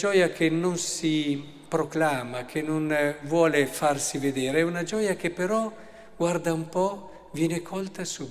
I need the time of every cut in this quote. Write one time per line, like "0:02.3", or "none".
none